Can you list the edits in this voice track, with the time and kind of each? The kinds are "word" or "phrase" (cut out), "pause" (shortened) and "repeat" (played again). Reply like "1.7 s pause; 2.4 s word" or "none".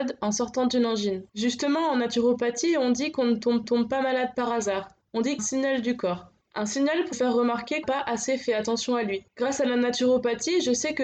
1.3 s pause; 3.6 s repeat; 5.0 s pause; 5.4 s phrase; 6.4 s pause; 7.1 s word; 7.8 s phrase; 9.3 s pause